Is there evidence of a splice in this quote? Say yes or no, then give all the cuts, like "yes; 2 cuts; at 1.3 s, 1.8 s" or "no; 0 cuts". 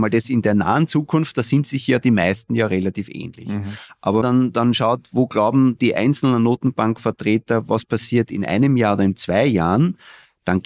yes; 1 cut; at 4.2 s